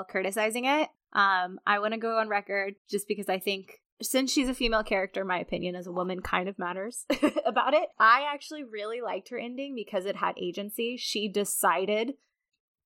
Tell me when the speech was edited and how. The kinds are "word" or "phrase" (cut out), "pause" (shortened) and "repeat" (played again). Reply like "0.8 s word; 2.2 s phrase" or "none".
1.0 s pause; 2.8 s pause; 3.8 s pause; 7.9 s pause